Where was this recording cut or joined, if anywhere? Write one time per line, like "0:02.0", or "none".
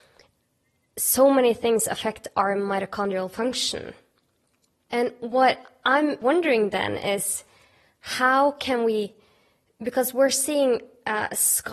none